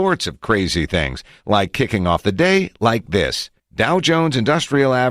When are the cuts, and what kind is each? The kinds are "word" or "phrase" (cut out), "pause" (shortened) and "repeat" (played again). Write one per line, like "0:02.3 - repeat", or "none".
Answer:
0:03.6 - pause